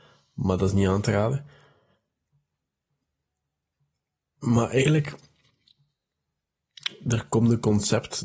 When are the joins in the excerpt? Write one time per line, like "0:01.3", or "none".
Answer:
none